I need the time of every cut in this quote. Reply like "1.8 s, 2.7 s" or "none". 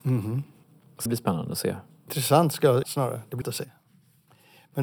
1.1 s, 2.8 s, 3.4 s

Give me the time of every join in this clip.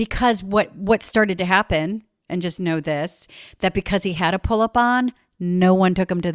none

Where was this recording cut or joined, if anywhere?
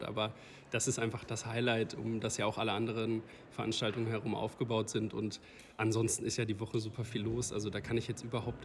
none

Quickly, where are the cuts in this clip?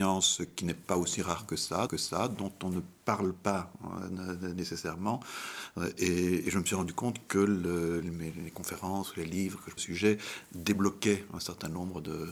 1.9 s, 8.0 s, 9.8 s

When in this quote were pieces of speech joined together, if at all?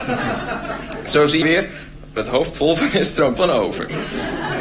1.4 s, 2.2 s, 3.4 s

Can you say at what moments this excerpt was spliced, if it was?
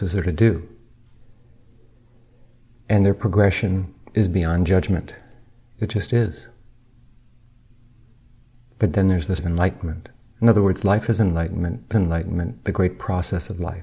9.4 s, 11.9 s

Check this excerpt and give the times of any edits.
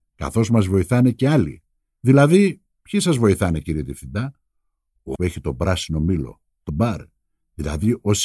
5.1 s, 6.7 s

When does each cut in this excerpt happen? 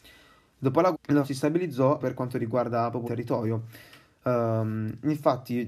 0.9 s, 1.2 s, 2.0 s, 3.0 s

